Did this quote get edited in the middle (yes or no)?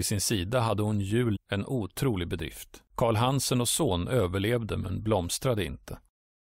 yes